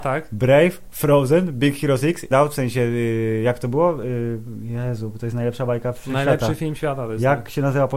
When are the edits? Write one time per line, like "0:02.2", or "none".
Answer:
0:02.3